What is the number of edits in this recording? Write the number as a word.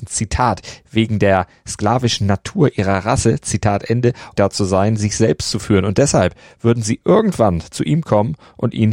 one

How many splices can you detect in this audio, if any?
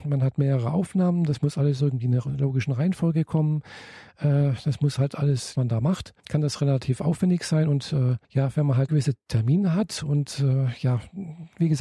four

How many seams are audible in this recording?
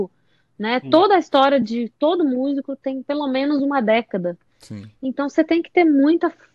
zero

